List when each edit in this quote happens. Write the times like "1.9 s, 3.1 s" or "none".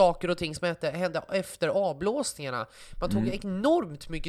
none